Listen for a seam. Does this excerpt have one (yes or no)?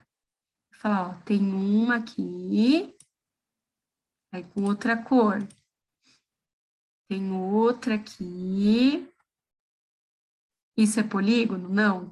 no